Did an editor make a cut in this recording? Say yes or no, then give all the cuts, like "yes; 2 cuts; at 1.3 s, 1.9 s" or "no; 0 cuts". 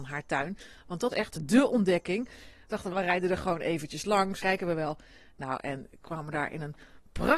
yes; 3 cuts; at 1.1 s, 2.9 s, 4.4 s